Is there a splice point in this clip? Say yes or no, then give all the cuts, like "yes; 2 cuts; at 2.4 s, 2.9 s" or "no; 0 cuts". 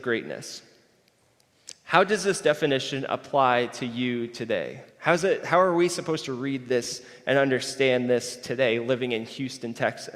yes; 1 cut; at 4.9 s